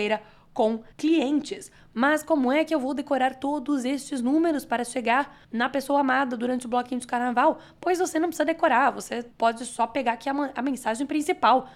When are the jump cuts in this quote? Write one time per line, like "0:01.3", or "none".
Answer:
0:00.9
0:05.4
0:09.3